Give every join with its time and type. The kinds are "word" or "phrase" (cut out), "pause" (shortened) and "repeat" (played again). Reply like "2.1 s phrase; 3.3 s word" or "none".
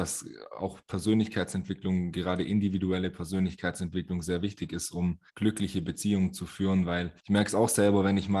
5.3 s pause; 7.2 s pause